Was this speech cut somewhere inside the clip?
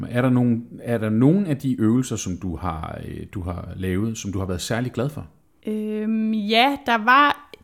no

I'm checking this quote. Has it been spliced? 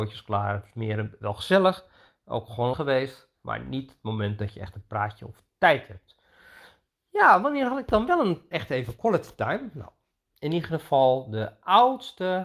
yes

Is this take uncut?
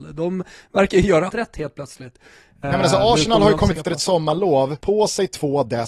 no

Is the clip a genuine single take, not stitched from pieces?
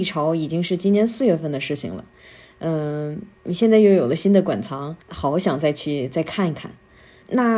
no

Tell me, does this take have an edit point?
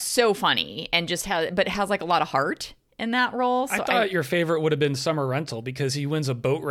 no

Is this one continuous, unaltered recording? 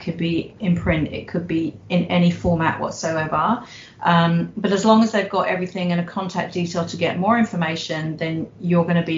yes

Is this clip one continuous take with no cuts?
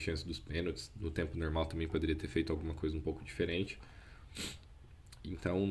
yes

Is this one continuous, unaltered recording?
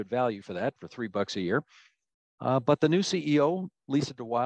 yes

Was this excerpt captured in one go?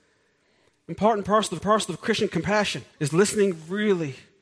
no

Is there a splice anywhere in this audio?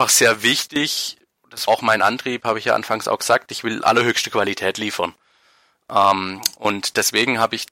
yes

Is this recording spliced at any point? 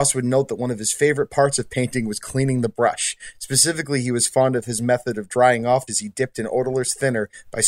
yes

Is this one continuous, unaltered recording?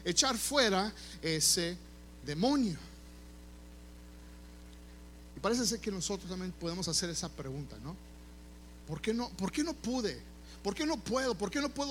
yes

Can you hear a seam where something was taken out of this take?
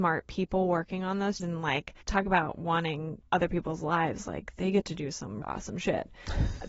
yes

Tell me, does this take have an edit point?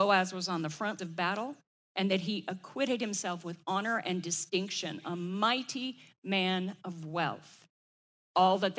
yes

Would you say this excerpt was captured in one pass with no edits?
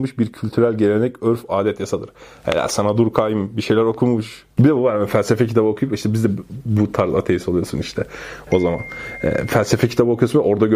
yes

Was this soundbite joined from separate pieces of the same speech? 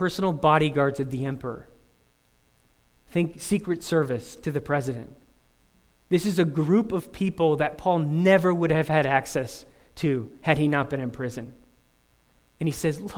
no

